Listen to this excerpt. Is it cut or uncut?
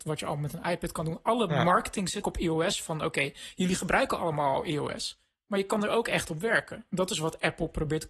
cut